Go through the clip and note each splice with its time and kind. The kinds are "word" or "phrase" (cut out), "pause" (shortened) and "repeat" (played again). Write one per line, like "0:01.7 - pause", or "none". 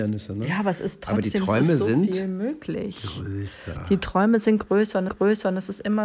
0:05.1 - repeat